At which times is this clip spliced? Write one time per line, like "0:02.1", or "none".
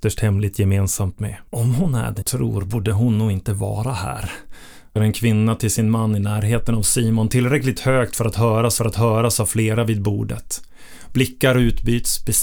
0:01.5
0:02.2
0:05.0
0:08.8